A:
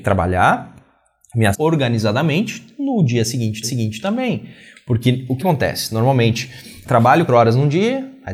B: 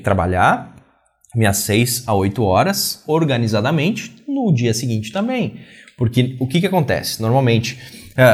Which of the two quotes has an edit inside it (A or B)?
A